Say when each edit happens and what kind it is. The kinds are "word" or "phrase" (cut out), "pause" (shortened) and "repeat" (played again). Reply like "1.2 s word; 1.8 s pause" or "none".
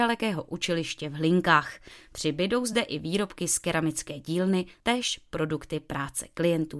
none